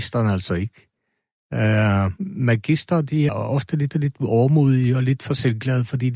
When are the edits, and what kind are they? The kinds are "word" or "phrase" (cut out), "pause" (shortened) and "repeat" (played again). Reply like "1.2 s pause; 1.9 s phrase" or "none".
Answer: 2.2 s pause; 3.3 s word; 3.9 s repeat